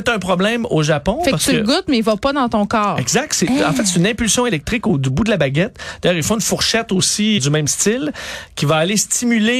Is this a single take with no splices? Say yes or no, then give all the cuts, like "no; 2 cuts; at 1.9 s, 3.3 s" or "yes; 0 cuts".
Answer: no; 1 cut; at 7.4 s